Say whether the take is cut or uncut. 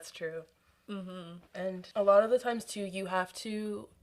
cut